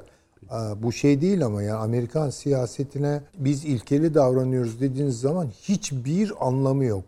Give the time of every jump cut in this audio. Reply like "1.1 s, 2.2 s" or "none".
3.3 s